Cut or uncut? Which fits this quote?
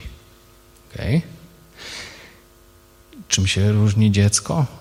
uncut